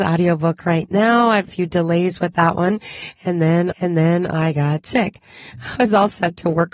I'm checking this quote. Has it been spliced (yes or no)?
yes